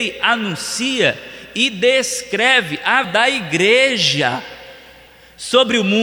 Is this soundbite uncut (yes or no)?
no